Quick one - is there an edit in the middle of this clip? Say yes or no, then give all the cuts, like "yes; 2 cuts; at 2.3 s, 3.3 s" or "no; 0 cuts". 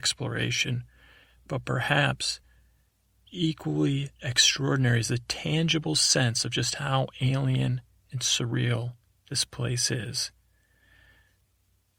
no; 0 cuts